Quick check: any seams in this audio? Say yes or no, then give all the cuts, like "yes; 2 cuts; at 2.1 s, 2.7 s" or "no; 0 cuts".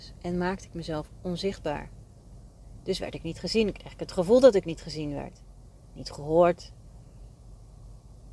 no; 0 cuts